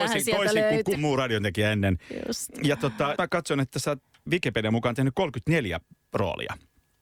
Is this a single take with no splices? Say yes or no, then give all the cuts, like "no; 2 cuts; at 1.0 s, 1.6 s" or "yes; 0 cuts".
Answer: no; 3 cuts; at 0.9 s, 3.2 s, 4.3 s